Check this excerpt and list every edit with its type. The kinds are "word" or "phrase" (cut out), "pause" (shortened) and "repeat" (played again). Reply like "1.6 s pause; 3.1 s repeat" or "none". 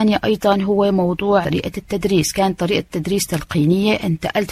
1.4 s word